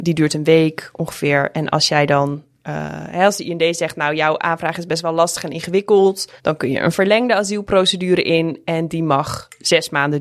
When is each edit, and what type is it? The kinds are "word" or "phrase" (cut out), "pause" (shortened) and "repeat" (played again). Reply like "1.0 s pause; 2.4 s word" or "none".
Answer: 6.4 s pause